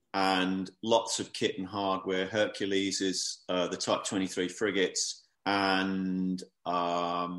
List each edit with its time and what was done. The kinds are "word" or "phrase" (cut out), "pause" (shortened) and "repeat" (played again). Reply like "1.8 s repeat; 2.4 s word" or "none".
5.3 s pause

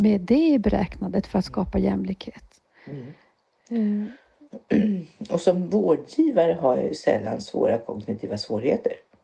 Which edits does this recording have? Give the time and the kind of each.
none

